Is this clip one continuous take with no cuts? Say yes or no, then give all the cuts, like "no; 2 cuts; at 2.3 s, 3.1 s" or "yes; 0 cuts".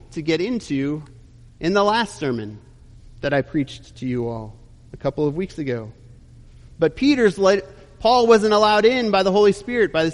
yes; 0 cuts